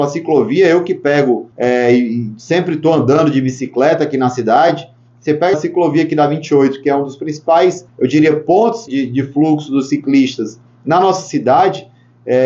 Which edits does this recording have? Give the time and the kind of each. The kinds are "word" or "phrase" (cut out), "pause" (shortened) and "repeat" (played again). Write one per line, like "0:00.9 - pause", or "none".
0:01.5 - pause
0:05.5 - word
0:07.9 - pause
0:08.9 - word